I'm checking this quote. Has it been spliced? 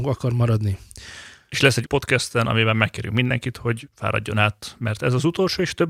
yes; 1 cut; at 1.8 s

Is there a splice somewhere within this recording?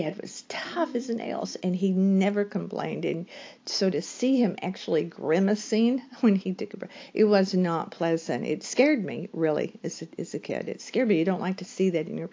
no; 0 cuts

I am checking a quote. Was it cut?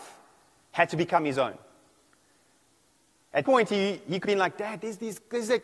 yes; 2 cuts; at 3.4 s, 4.2 s

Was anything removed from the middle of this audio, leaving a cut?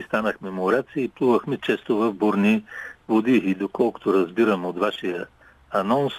no; 0 cuts

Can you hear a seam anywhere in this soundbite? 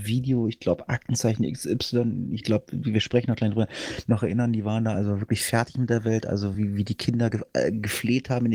no; 0 cuts

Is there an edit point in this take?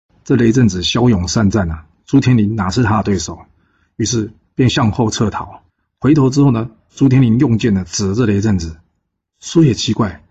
yes; 1 cut; at 5.7 s

